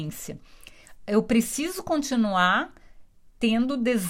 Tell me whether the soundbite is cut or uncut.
uncut